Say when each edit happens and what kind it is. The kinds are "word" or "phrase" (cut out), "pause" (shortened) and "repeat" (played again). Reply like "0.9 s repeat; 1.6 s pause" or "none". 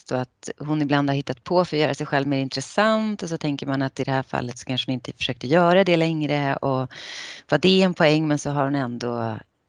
none